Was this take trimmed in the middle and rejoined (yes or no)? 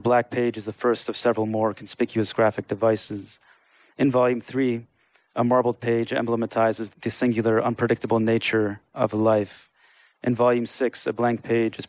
yes